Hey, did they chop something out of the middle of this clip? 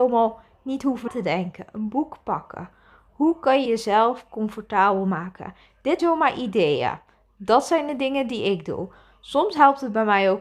yes; 3 cuts; at 1.1 s, 3.6 s, 6.0 s

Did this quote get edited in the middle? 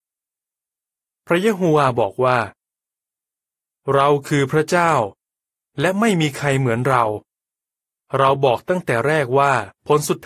no; 0 cuts

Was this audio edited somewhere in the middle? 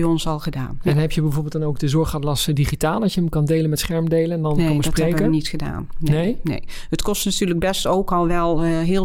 no; 0 cuts

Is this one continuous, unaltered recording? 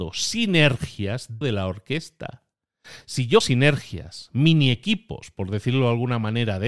no; 2 cuts; at 1.4 s, 3.4 s

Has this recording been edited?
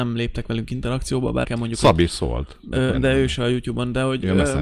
yes; 2 cuts; at 1.4 s, 2.9 s

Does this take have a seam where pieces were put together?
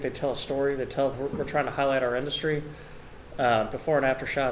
yes; 1 cut; at 1.1 s

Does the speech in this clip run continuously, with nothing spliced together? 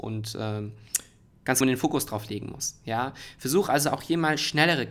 no; 1 cut; at 1.6 s

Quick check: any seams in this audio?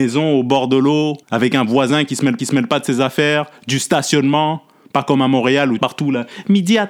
yes; 3 cuts; at 1.2 s, 2.4 s, 5.8 s

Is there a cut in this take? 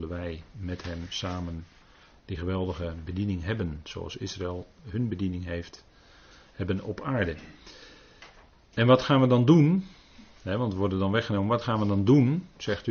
no; 0 cuts

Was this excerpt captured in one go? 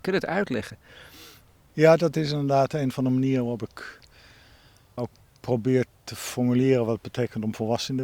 no; 2 cuts; at 1.5 s, 5.0 s

